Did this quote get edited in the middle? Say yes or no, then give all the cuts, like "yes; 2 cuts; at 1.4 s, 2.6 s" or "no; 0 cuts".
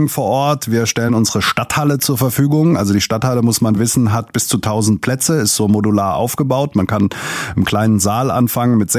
no; 0 cuts